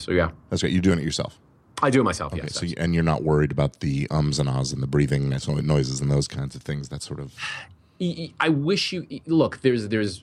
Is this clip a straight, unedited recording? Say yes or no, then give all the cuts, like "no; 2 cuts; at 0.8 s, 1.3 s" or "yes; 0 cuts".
yes; 0 cuts